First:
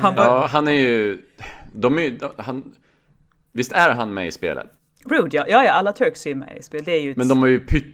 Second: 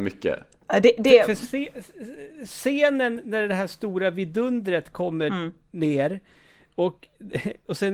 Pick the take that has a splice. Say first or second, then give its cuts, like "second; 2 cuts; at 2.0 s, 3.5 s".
first; 1 cut; at 4.8 s